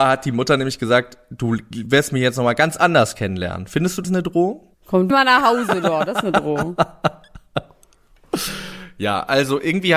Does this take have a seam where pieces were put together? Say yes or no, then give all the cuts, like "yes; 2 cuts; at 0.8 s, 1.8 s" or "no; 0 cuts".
yes; 3 cuts; at 4.0 s, 4.7 s, 5.1 s